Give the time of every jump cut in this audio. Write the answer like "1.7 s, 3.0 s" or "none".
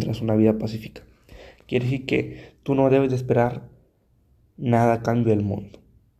none